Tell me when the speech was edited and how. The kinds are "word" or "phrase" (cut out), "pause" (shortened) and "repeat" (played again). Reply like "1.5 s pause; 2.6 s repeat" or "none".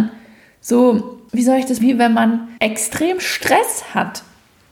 1.8 s word; 2.6 s pause

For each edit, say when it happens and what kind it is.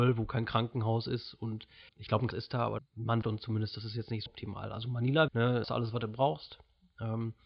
1.9 s word; 2.3 s word; 2.8 s word; 3.2 s word; 4.3 s word; 5.3 s word; 5.6 s word

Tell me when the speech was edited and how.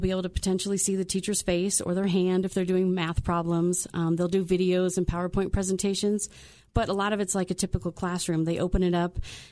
none

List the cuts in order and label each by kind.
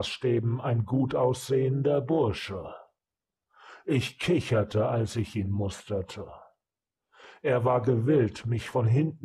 none

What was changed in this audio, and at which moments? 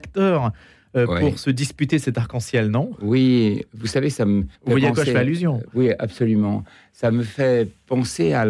3.7 s word; 4.5 s pause

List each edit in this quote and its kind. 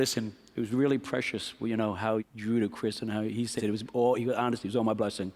2.2 s word; 3.6 s word

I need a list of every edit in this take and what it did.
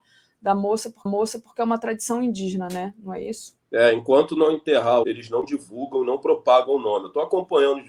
1.1 s repeat; 5.0 s phrase

